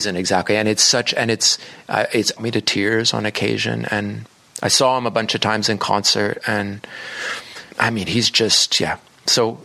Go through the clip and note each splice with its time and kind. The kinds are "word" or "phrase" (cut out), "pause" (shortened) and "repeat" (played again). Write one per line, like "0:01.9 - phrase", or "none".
0:02.4 - phrase
0:07.7 - pause